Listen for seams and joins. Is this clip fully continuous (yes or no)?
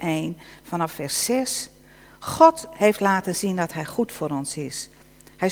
yes